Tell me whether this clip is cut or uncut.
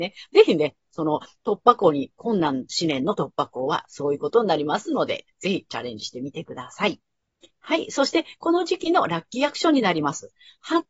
uncut